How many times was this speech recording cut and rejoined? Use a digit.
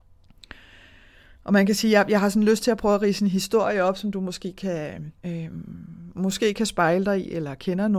1